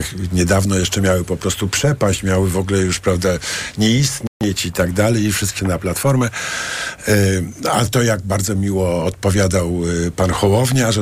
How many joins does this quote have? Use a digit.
1